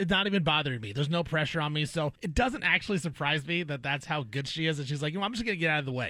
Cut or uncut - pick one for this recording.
cut